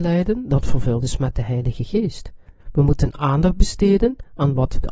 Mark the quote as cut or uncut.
cut